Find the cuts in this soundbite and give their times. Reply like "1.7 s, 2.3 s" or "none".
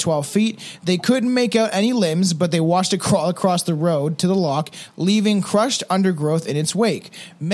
none